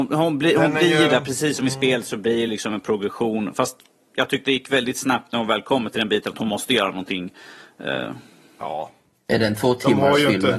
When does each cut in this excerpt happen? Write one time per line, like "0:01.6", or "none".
none